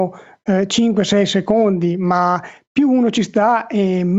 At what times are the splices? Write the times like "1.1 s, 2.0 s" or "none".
none